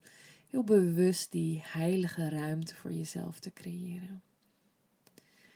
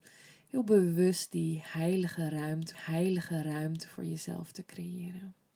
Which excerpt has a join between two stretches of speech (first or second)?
second